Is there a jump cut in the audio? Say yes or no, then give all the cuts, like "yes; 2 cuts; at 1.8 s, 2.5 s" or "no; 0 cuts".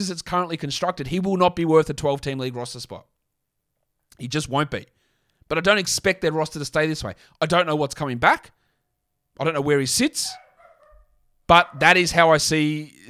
no; 0 cuts